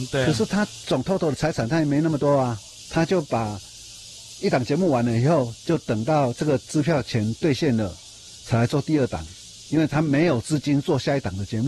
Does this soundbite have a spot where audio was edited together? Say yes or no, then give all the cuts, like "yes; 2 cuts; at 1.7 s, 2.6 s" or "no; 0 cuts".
no; 0 cuts